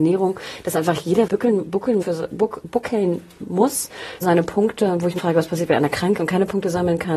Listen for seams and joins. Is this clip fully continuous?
no; 5 cuts; at 1.3 s, 2.0 s, 4.2 s, 5.2 s, 6.2 s

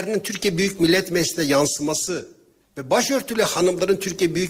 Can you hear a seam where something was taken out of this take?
no; 0 cuts

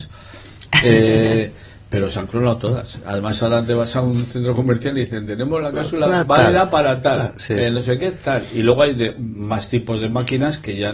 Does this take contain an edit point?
no; 0 cuts

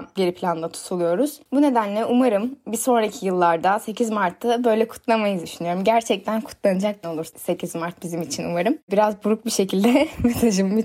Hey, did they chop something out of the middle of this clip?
yes; 2 cuts; at 5.4 s, 7.0 s

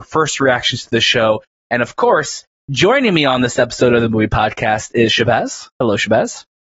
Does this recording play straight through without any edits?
yes; 0 cuts

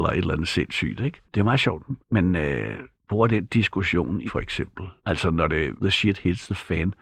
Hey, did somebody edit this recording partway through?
yes; 6 cuts; at 1.2 s, 2.0 s, 2.9 s, 4.3 s, 5.0 s, 5.8 s

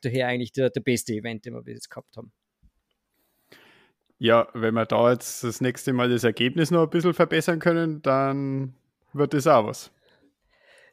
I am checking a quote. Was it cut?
no; 0 cuts

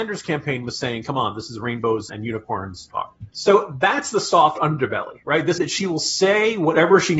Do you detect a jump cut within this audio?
yes; 4 cuts; at 2.1 s, 2.9 s, 3.3 s, 5.6 s

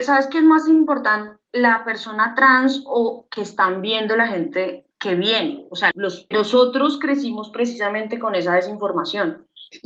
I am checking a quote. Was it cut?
yes; 3 cuts; at 4.9 s, 5.9 s, 6.3 s

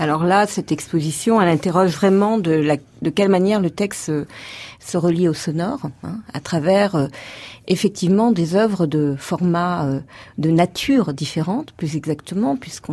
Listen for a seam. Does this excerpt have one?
no; 0 cuts

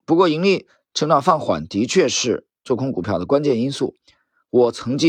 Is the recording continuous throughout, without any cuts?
yes; 0 cuts

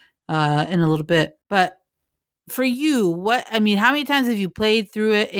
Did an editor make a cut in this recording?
yes; 1 cut; at 1.4 s

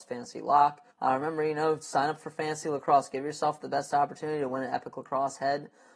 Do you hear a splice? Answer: yes; 1 cut; at 0.9 s

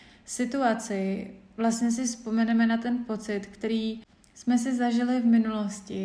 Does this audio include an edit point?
no; 0 cuts

